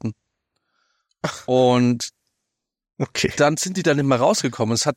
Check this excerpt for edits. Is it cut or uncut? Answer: uncut